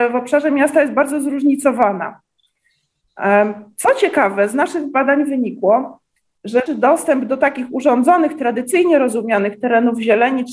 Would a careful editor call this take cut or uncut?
cut